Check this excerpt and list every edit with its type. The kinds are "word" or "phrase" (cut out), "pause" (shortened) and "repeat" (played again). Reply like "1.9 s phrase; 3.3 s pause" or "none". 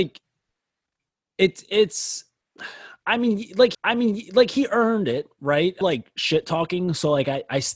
3.7 s repeat; 5.8 s phrase